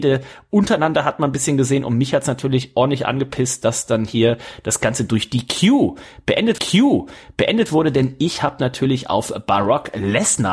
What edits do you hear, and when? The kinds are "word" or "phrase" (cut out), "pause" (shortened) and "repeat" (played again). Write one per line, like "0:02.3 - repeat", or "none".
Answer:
0:06.6 - repeat